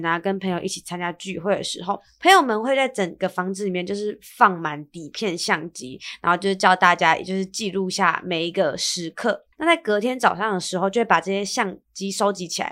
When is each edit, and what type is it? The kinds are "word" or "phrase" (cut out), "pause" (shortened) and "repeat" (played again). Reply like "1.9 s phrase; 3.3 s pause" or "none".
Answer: 9.5 s pause